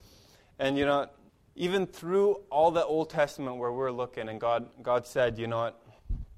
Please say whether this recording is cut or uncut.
cut